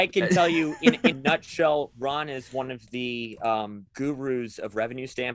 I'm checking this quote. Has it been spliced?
yes; 2 cuts; at 1.1 s, 3.9 s

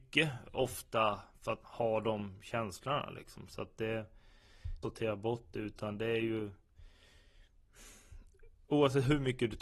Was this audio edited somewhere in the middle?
yes; 2 cuts; at 1.6 s, 4.8 s

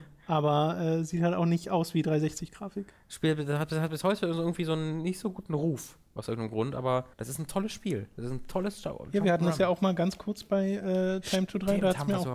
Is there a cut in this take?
yes; 1 cut; at 7.1 s

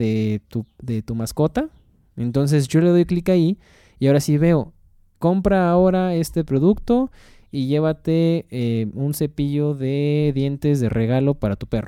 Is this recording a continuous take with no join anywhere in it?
yes; 0 cuts

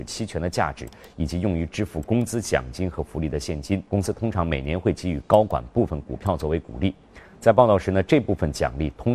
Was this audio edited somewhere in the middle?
yes; 1 cut; at 3.9 s

